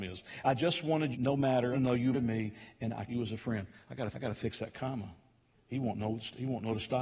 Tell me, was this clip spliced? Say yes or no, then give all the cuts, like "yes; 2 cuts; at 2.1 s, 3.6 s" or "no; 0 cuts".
yes; 6 cuts; at 1.1 s, 1.7 s, 2.1 s, 3.1 s, 4.1 s, 5.5 s